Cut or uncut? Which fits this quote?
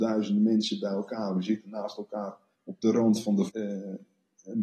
cut